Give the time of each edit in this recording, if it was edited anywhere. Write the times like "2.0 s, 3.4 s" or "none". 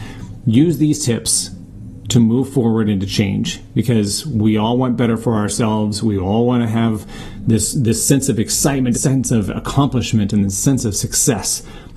8.9 s